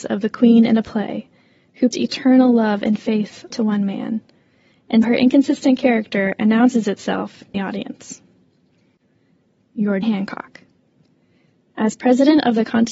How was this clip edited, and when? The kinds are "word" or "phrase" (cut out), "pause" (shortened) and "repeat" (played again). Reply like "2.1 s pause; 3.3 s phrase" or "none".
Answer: 1.9 s word; 3.5 s word; 5.0 s word; 7.5 s phrase; 10.0 s word